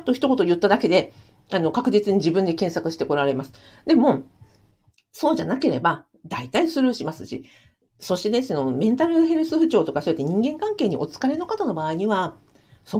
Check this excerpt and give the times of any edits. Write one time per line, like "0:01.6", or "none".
none